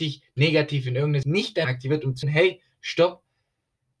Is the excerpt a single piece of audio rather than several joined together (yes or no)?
no